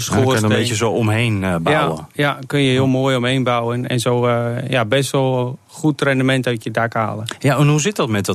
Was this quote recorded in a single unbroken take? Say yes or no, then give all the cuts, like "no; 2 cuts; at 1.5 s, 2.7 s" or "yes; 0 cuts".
yes; 0 cuts